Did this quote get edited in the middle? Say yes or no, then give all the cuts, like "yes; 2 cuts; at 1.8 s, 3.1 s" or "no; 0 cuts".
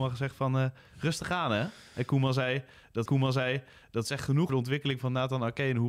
yes; 2 cuts; at 3.1 s, 4.5 s